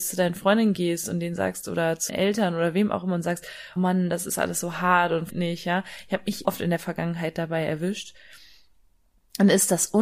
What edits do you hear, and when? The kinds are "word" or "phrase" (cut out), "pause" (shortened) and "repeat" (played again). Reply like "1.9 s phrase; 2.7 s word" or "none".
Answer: 2.1 s word; 3.8 s word; 5.3 s word; 6.4 s word